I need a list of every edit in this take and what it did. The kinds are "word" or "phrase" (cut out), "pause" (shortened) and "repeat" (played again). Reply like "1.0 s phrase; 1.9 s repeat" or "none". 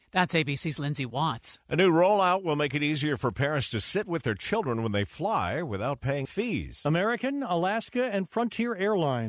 6.3 s word